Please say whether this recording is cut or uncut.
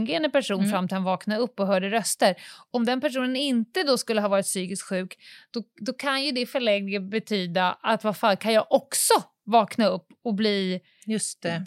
uncut